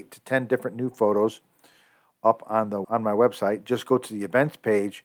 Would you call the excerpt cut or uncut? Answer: cut